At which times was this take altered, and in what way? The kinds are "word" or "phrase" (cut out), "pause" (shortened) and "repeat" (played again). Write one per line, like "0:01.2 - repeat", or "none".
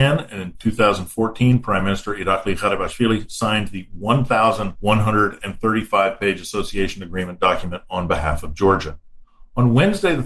none

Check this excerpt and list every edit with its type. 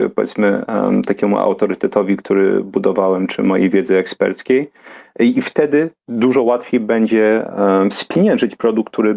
none

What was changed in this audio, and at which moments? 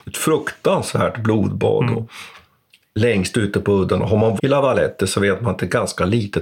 0:04.4 - word

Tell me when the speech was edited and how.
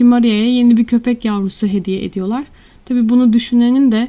none

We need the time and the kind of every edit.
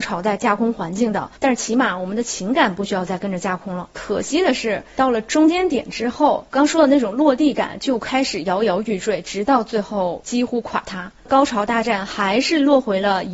0:01.4 - pause

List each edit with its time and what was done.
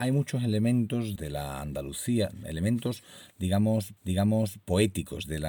0:01.2 - phrase
0:04.0 - repeat

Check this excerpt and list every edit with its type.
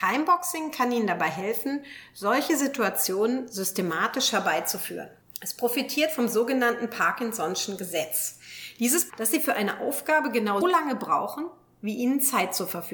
0:05.2 - pause
0:09.1 - word
0:10.6 - word

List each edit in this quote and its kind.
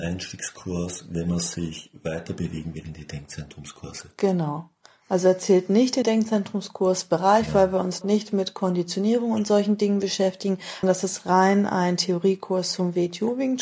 0:06.0 - word
0:08.0 - word
0:10.8 - word

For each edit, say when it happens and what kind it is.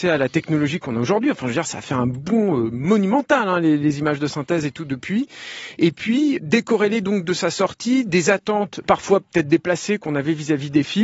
0:06.4 - word
0:08.8 - word

